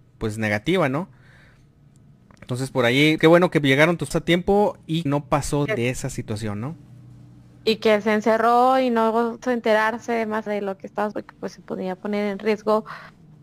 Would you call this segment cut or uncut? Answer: cut